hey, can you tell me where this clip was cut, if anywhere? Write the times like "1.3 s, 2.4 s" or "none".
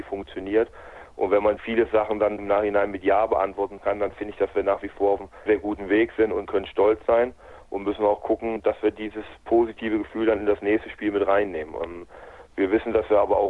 5.5 s

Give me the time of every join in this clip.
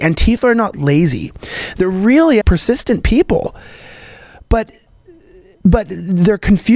2.4 s

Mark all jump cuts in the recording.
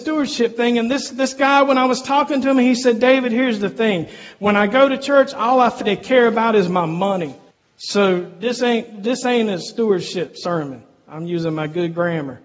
5.8 s, 7.5 s

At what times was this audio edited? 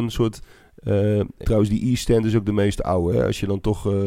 1.4 s

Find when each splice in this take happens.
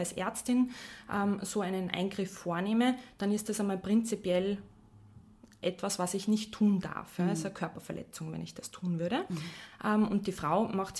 none

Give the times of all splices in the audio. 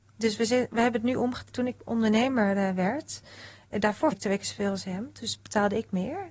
4.1 s

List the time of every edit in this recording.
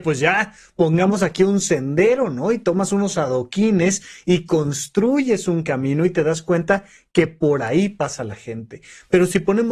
none

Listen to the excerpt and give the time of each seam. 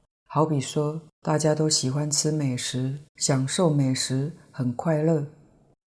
1.1 s, 3.1 s

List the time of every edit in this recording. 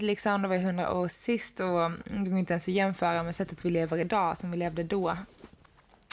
none

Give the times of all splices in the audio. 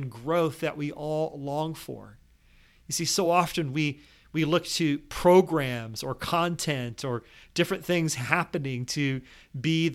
none

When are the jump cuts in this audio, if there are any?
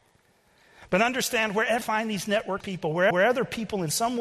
1.8 s, 2.6 s, 3.1 s

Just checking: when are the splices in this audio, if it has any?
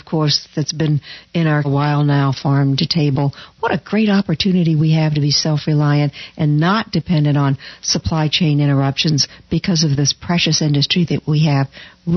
1.6 s

